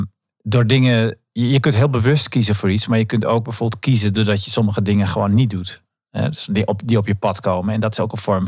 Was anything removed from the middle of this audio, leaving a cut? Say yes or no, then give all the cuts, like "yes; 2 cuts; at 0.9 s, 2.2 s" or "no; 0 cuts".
no; 0 cuts